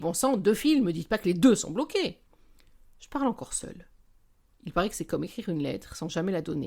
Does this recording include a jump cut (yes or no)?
no